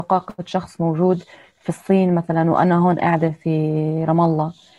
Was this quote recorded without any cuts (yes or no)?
yes